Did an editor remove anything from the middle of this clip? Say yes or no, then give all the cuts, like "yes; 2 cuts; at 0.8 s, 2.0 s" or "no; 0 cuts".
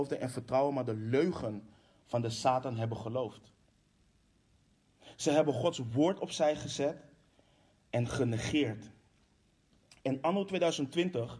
no; 0 cuts